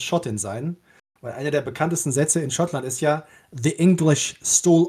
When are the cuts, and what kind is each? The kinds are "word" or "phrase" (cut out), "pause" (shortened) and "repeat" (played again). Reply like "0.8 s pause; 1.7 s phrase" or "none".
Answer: none